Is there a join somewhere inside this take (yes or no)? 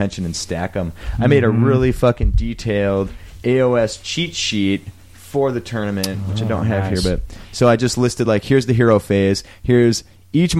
no